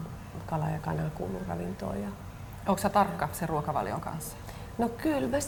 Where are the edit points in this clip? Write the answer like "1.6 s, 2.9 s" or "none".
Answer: none